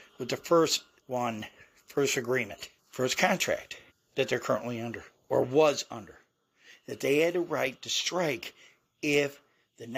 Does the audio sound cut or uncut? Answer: cut